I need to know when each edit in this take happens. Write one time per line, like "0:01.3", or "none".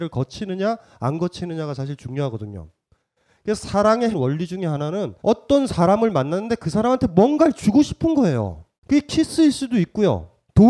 0:04.1
0:05.2
0:08.8